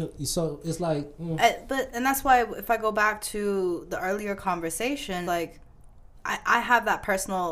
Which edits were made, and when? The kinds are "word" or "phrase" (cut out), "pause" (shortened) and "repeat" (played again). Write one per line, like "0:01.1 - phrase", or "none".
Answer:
0:01.9 - word
0:05.2 - word

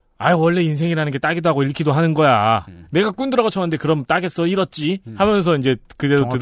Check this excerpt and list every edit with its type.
none

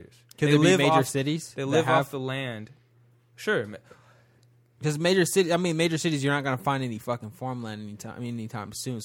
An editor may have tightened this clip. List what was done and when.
none

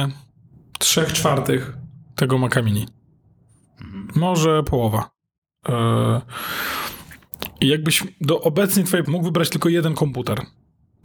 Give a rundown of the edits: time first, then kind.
0:09.1 - word

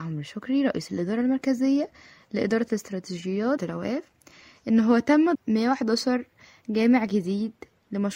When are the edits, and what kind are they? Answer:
0:03.6 - word
0:05.3 - word

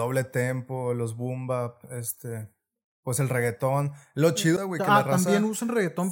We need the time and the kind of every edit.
0:04.6 - word

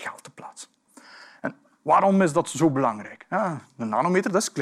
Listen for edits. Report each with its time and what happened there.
none

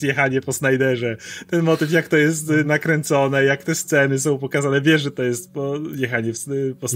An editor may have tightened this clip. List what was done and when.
none

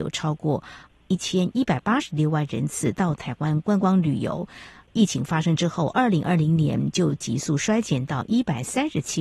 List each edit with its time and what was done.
none

